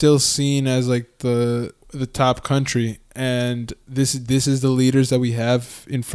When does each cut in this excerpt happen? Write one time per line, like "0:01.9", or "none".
0:01.8